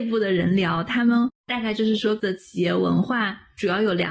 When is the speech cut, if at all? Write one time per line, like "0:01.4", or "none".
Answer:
0:02.2